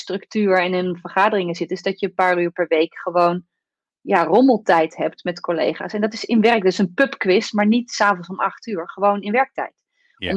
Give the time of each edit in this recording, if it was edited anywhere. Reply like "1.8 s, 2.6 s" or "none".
none